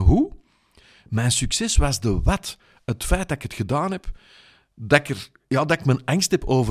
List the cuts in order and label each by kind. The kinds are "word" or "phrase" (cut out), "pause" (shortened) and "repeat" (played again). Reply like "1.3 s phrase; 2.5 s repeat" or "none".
none